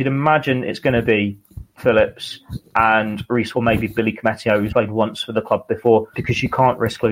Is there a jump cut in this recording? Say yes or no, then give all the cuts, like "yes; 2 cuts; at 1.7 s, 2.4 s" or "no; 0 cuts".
yes; 4 cuts; at 1.8 s, 3.5 s, 4.7 s, 6.1 s